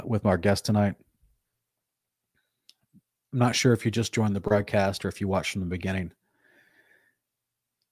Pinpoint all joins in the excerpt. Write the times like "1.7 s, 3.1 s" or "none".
none

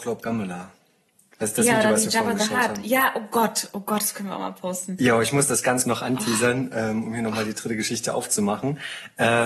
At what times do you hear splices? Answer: 5.8 s

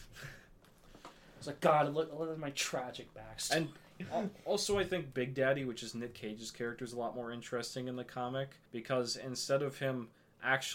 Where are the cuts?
8.7 s

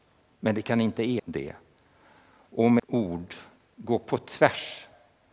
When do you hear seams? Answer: 1.2 s, 2.8 s

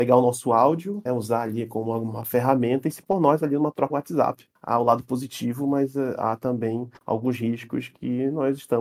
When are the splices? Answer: 1.1 s, 3.0 s, 3.9 s, 7.0 s

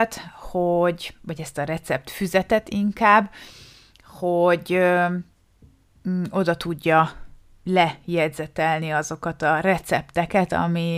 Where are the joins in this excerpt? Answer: none

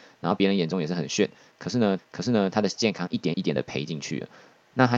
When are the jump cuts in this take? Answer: 2.0 s

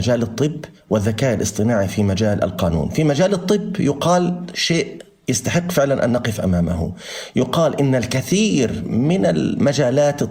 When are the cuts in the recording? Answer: none

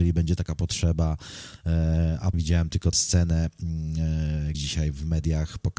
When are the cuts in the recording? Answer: 2.3 s, 2.9 s, 4.5 s

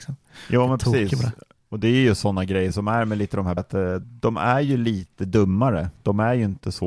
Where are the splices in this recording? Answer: 3.6 s, 4.0 s

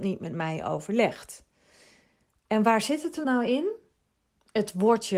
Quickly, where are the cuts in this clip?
3.2 s

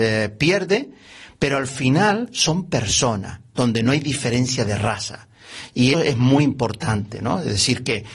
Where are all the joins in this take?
5.9 s

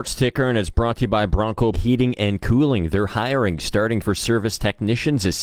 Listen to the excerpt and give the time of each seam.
1.7 s, 4.0 s

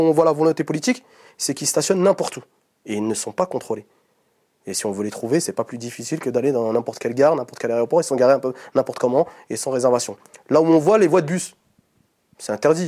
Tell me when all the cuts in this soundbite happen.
none

